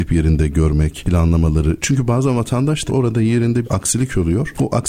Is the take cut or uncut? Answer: cut